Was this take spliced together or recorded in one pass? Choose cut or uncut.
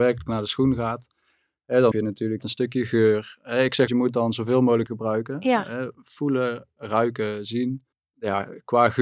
cut